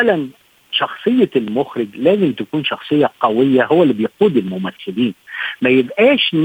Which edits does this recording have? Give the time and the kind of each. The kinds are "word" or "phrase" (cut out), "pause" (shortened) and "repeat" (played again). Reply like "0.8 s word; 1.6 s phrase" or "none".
none